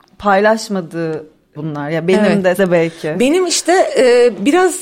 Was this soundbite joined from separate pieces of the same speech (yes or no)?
yes